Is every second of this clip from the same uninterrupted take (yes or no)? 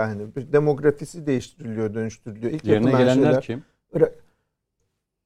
yes